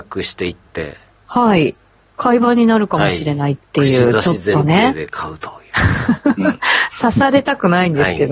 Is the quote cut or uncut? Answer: uncut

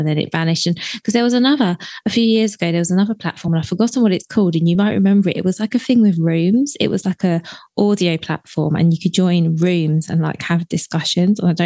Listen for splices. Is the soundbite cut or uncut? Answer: uncut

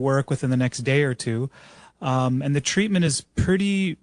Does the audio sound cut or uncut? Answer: uncut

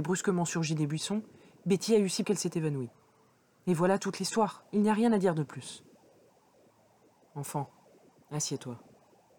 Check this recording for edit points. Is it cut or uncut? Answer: cut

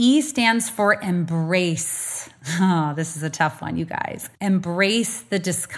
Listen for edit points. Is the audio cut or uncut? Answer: cut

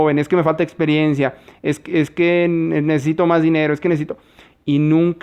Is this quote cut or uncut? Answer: uncut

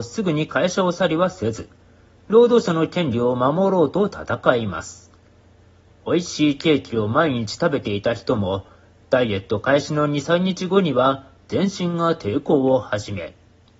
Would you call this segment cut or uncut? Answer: uncut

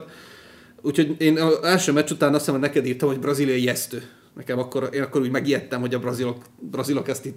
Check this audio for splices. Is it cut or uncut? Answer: uncut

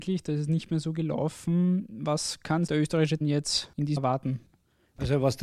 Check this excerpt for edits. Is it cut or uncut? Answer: cut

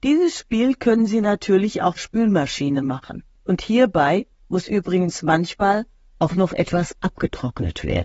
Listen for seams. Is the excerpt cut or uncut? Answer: cut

